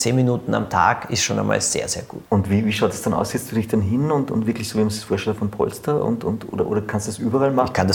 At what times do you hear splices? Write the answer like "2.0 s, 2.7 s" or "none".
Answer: 2.3 s